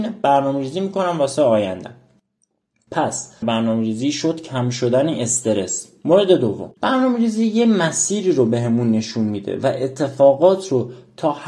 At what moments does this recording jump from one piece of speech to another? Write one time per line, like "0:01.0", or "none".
0:03.4